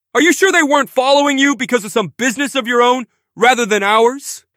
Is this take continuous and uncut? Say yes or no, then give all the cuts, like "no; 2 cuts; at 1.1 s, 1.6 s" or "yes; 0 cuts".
yes; 0 cuts